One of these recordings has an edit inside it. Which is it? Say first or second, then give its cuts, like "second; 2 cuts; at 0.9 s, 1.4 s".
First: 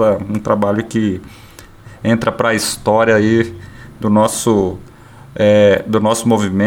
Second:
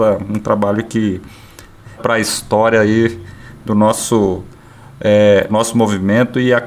second; 2 cuts; at 2.0 s, 5.5 s